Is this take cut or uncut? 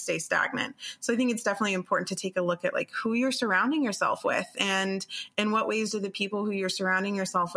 uncut